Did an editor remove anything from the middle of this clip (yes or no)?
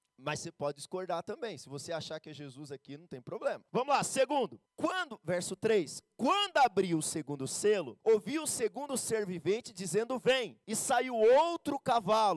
yes